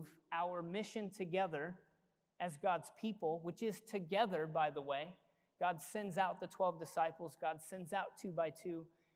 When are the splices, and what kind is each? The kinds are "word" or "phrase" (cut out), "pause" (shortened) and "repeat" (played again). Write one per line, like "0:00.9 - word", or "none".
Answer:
none